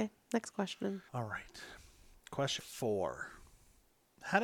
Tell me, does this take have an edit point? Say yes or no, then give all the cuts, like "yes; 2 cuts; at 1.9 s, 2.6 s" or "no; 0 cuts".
yes; 2 cuts; at 1.1 s, 2.6 s